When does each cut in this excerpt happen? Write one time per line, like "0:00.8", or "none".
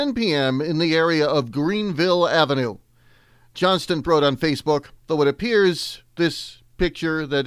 0:04.0
0:05.0